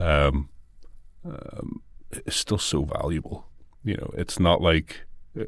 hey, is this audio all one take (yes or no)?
yes